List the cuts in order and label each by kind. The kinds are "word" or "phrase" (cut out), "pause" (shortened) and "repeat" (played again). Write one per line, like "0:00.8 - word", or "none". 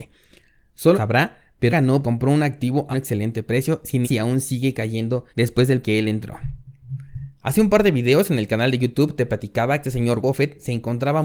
0:00.9 - phrase
0:01.7 - word
0:02.0 - word
0:02.9 - word
0:04.0 - word
0:05.3 - pause
0:05.8 - phrase
0:09.8 - phrase
0:10.2 - word